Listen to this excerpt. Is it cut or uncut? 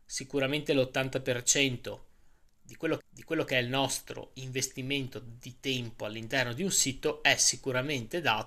cut